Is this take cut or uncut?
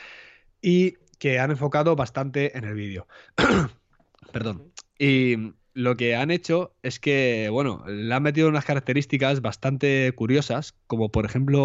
uncut